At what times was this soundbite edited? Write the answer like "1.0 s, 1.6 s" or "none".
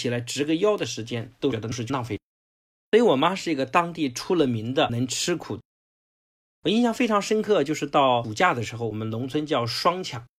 none